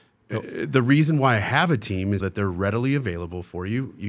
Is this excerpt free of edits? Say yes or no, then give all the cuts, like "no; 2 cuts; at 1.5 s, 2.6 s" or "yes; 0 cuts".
no; 1 cut; at 2.2 s